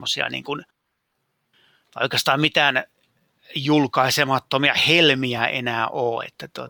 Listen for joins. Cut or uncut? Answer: uncut